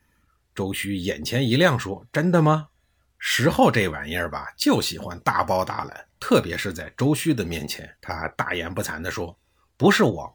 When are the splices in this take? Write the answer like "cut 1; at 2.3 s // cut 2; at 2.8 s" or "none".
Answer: cut 1; at 8.0 s